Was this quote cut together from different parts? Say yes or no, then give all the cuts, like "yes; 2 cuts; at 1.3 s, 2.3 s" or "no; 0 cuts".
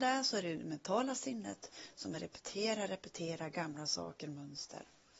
no; 0 cuts